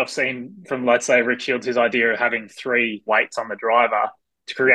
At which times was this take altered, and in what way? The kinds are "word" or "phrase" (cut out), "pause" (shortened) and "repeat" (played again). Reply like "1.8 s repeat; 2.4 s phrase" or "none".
3.1 s phrase